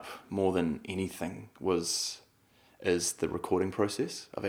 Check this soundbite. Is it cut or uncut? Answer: uncut